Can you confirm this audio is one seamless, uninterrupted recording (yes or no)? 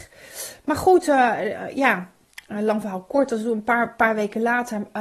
yes